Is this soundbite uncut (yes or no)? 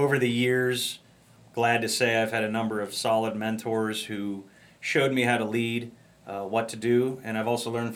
yes